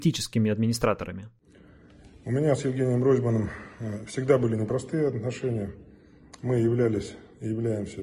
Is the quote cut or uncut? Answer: uncut